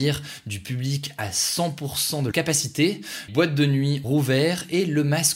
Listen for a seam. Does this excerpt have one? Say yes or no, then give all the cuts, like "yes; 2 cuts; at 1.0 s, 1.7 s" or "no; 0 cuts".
yes; 3 cuts; at 2.3 s, 3.3 s, 4.0 s